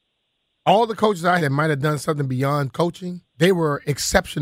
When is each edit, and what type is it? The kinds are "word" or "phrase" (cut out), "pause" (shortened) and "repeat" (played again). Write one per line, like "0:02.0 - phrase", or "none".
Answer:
0:01.4 - word
0:03.3 - pause